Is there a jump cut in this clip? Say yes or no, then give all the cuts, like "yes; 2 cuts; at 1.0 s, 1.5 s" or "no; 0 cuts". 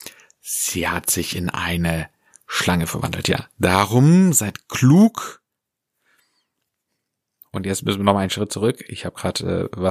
no; 0 cuts